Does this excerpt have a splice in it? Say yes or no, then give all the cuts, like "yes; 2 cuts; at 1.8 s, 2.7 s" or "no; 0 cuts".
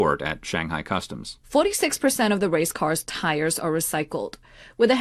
yes; 1 cut; at 1.4 s